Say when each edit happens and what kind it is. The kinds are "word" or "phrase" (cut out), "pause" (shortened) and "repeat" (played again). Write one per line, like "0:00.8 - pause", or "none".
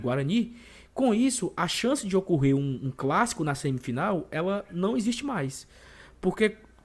none